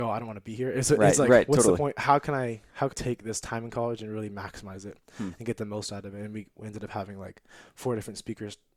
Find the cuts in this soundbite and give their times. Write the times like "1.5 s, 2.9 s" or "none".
2.9 s